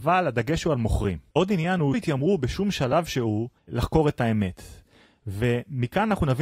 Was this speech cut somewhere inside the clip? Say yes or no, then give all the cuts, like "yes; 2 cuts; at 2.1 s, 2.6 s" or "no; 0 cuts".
yes; 2 cuts; at 1.9 s, 3.6 s